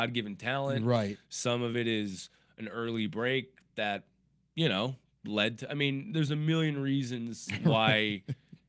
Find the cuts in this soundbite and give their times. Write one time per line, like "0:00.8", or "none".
none